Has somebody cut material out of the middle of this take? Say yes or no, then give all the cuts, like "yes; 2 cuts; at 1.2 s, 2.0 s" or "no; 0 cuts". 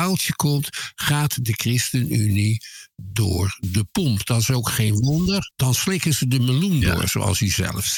yes; 1 cut; at 5.5 s